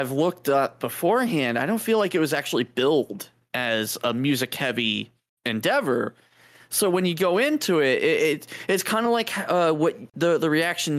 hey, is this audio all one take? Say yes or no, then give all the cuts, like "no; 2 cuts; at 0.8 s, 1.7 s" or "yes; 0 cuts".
yes; 0 cuts